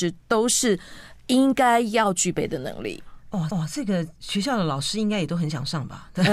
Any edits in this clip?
yes; 1 cut; at 3.5 s

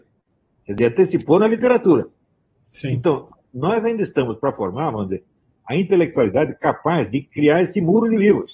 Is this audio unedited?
yes; 0 cuts

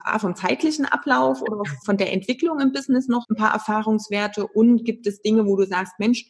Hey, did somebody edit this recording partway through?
yes; 2 cuts; at 1.8 s, 3.2 s

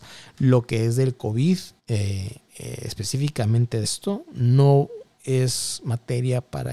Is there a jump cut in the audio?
yes; 2 cuts; at 1.8 s, 3.8 s

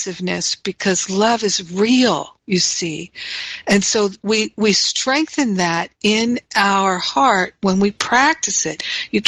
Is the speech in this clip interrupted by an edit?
yes; 1 cut; at 2.4 s

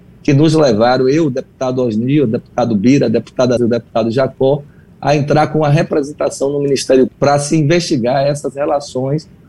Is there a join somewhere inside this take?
yes; 2 cuts; at 3.6 s, 7.1 s

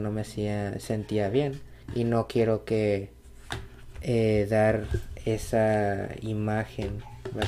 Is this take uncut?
no; 1 cut; at 1.8 s

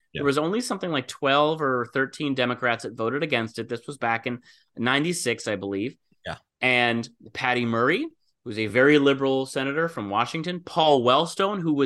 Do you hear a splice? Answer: no; 0 cuts

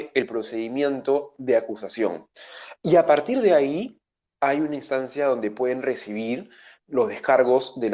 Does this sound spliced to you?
no; 0 cuts

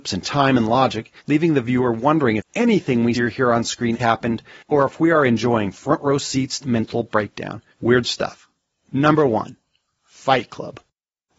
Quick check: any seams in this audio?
yes; 6 cuts; at 1.2 s, 2.4 s, 3.1 s, 4.0 s, 6.6 s, 7.7 s

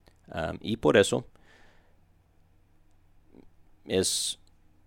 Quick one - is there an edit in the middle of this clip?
no; 0 cuts

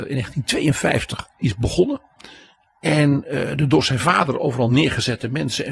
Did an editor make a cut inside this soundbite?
no; 0 cuts

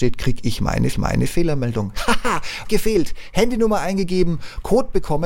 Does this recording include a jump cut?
yes; 2 cuts; at 0.9 s, 2.6 s

